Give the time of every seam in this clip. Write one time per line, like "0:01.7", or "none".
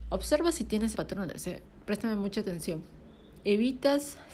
0:00.9